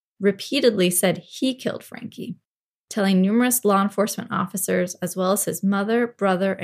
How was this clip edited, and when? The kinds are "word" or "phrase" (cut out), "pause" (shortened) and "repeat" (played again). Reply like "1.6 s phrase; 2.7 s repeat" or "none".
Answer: none